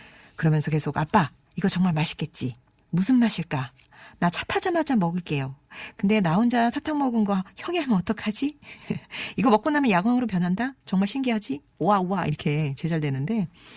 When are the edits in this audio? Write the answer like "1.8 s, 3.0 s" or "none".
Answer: none